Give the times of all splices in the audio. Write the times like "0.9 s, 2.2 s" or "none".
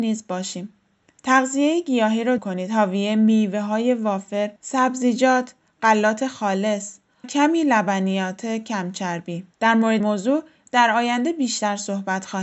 2.4 s, 4.6 s, 7.2 s, 9.5 s, 10.0 s